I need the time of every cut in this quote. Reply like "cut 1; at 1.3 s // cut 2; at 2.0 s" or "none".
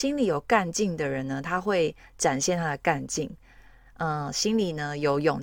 none